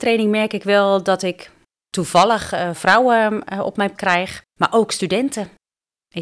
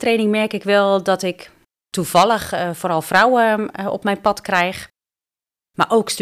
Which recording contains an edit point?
first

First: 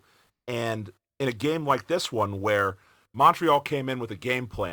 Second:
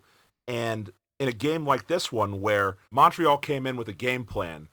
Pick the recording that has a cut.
second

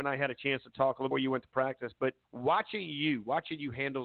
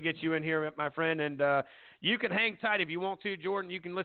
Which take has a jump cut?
first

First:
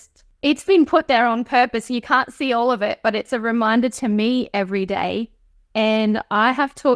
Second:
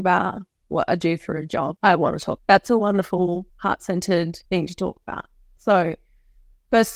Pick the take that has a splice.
second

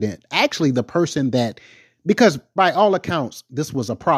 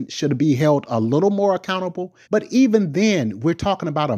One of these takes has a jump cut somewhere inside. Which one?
second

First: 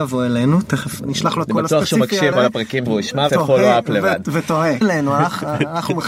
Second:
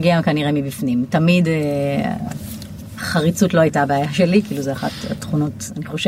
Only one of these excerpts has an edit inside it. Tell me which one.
first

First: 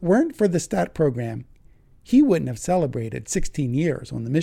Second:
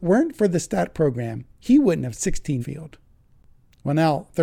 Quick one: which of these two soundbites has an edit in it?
second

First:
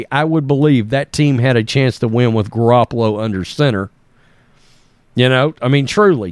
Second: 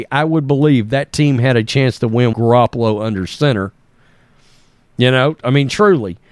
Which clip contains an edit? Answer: second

